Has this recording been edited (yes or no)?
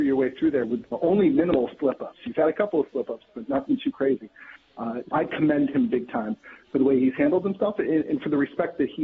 yes